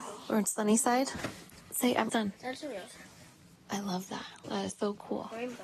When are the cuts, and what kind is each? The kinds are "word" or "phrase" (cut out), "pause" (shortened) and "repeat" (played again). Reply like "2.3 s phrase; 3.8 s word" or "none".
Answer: 2.1 s word